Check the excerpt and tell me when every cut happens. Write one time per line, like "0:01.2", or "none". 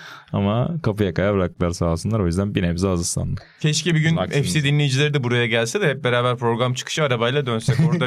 none